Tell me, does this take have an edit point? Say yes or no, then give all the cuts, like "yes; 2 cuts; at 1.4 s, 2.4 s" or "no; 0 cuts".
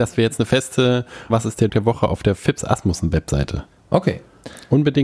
yes; 2 cuts; at 1.3 s, 1.7 s